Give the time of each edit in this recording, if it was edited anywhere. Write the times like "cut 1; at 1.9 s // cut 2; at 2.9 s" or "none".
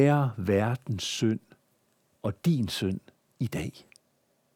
none